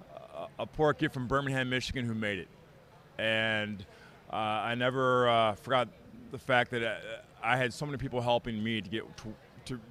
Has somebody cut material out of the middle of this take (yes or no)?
no